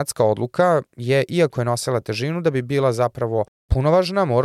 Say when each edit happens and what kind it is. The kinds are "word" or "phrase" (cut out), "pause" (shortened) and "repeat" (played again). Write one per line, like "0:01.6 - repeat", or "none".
none